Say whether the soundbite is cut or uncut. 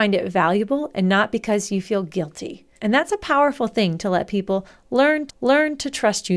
cut